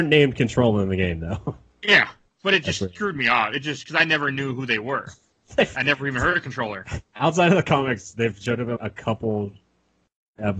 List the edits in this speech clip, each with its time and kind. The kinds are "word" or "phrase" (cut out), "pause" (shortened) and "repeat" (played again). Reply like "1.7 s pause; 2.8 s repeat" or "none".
8.8 s word